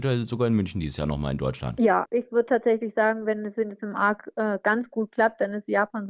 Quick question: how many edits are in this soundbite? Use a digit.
1